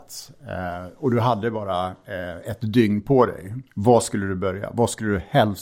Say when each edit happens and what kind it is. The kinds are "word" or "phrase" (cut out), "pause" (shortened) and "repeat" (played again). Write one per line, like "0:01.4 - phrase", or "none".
0:03.7 - pause